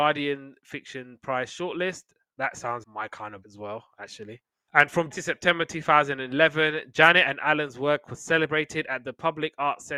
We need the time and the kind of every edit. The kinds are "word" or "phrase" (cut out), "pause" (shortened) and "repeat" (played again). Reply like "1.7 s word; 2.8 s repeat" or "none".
2.8 s word; 3.4 s word; 5.1 s word